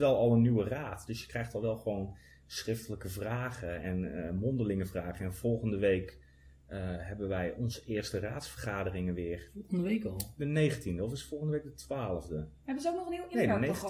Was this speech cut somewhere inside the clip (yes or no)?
no